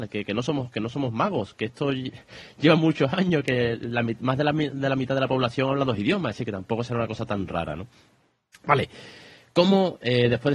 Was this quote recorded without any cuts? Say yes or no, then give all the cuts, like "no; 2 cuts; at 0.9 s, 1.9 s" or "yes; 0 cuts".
yes; 0 cuts